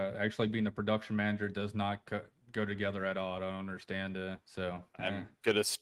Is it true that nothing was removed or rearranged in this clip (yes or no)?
no